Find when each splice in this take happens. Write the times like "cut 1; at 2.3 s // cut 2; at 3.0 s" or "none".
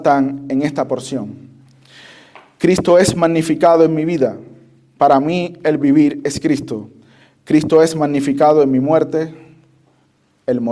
none